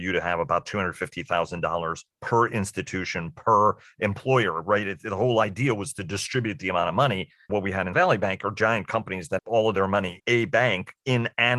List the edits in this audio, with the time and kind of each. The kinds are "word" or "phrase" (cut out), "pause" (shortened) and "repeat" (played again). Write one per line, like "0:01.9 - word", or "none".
0:07.5 - word
0:07.9 - word
0:09.4 - word
0:10.2 - word